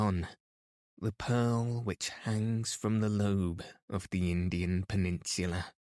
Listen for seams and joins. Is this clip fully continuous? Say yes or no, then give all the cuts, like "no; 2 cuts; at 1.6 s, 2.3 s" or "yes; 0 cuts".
yes; 0 cuts